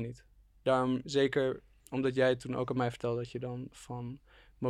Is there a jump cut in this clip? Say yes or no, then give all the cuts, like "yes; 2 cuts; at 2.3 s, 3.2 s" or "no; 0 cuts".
no; 0 cuts